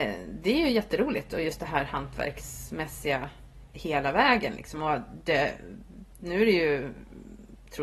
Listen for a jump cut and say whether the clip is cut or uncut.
uncut